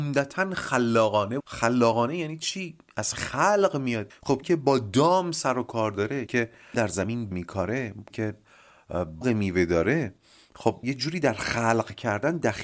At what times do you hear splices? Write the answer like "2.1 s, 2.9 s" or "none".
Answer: 1.4 s, 4.1 s, 4.4 s, 6.3 s, 6.7 s, 7.3 s, 8.1 s, 9.2 s, 10.8 s

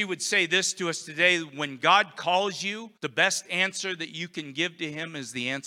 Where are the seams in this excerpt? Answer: 3.0 s

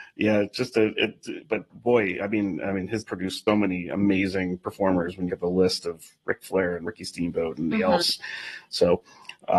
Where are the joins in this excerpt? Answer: 1.7 s, 3.0 s, 3.5 s, 5.3 s, 7.7 s

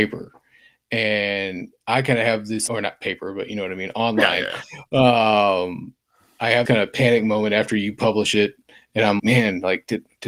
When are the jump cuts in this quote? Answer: 2.7 s, 6.7 s, 9.2 s

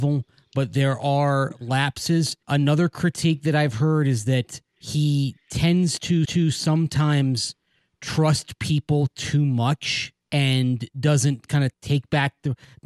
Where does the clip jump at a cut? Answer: 2.4 s, 4.7 s, 6.2 s, 10.2 s, 11.7 s

